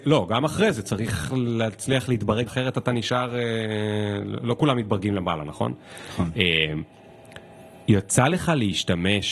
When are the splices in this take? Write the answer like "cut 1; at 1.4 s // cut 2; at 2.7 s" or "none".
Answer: cut 1; at 2.5 s